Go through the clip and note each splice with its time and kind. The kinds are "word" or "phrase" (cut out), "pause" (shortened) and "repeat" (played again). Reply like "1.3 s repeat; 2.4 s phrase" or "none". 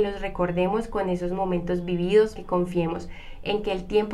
2.4 s word